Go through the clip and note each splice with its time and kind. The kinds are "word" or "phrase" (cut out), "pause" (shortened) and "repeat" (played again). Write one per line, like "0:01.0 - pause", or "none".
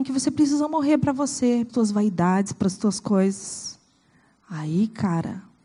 0:01.7 - word